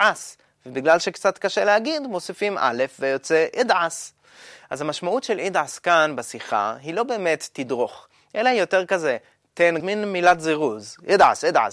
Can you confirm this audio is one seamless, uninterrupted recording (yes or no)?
no